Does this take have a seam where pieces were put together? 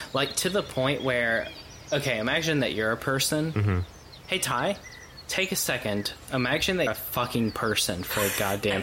yes; 1 cut; at 6.9 s

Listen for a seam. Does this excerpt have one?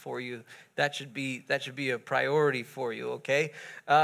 no; 0 cuts

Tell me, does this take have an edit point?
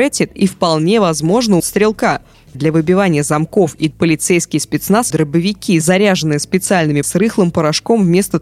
yes; 5 cuts; at 1.6 s, 2.5 s, 3.9 s, 5.1 s, 7.0 s

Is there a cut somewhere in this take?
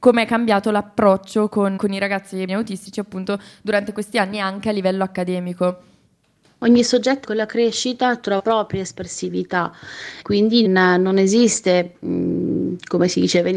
yes; 6 cuts; at 1.8 s, 2.5 s, 7.2 s, 8.4 s, 10.2 s, 10.6 s

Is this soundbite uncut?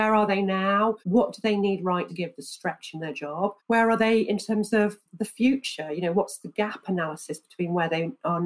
no; 4 cuts; at 1.0 s, 2.1 s, 3.6 s, 5.1 s

